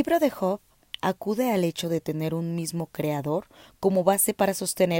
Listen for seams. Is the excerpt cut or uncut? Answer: uncut